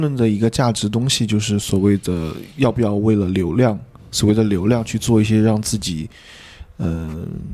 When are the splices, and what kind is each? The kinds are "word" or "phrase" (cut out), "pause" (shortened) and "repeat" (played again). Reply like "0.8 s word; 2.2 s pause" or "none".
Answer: none